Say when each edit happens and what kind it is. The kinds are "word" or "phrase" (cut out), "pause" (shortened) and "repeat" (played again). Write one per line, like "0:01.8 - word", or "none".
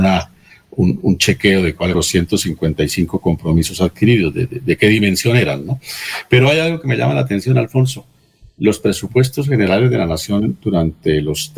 0:01.0 - word
0:01.9 - word

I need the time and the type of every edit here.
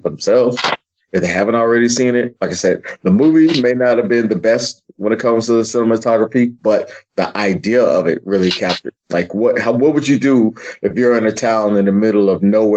0:09.0 - pause

